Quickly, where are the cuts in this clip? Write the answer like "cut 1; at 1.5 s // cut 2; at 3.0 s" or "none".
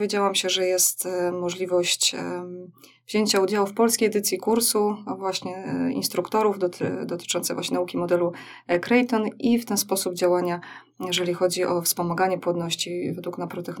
none